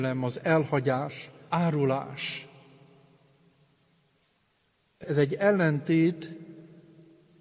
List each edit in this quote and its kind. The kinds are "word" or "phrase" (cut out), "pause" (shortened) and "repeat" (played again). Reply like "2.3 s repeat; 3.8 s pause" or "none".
1.5 s word; 5.0 s word